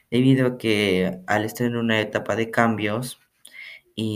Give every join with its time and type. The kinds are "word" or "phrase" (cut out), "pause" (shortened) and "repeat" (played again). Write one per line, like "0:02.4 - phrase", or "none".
none